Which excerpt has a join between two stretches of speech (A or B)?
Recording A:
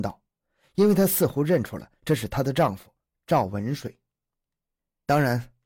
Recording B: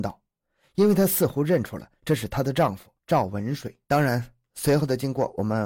B